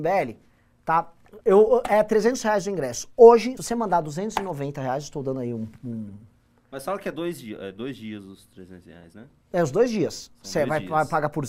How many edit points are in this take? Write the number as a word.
two